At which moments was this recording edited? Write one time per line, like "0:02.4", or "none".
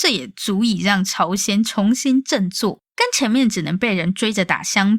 0:02.9